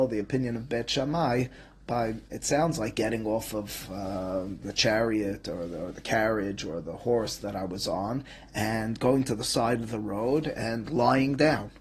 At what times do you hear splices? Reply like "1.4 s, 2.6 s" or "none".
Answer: none

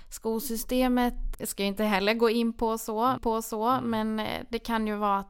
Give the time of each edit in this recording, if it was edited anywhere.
1.3 s, 3.2 s

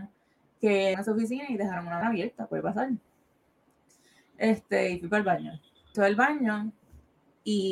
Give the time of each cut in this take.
0.9 s, 2.0 s, 5.9 s

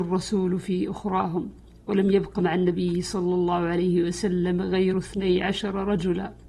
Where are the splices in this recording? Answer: none

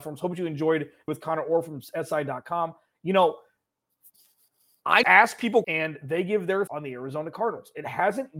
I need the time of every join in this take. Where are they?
1.1 s, 5.0 s, 5.6 s, 6.7 s

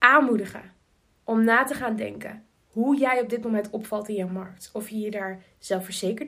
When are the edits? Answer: none

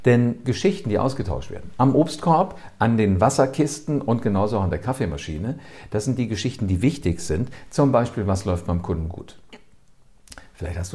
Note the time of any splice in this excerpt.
none

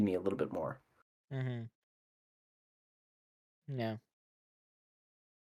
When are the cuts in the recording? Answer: none

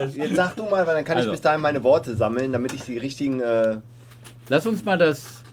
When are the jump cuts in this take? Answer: 4.4 s

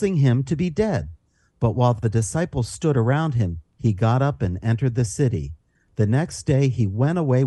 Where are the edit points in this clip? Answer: none

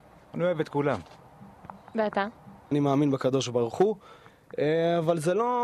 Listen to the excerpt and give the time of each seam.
none

